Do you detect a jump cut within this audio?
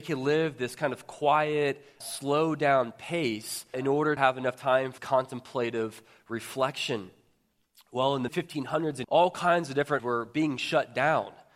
yes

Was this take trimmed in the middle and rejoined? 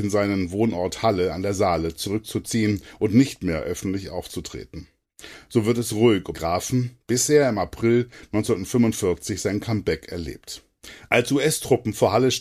yes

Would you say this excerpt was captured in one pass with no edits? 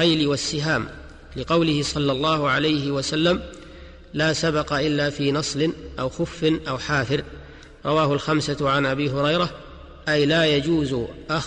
yes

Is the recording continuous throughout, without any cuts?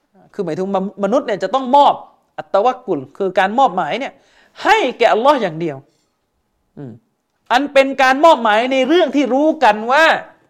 yes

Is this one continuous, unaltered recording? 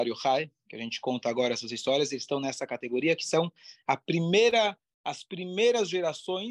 yes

